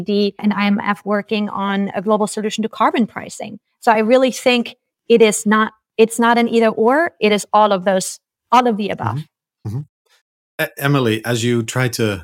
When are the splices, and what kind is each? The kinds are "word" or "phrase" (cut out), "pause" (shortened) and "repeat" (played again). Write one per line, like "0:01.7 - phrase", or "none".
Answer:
none